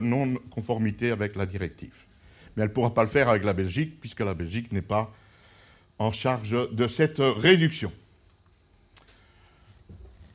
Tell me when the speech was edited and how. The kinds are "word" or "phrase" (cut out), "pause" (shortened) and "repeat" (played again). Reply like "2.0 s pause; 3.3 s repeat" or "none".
none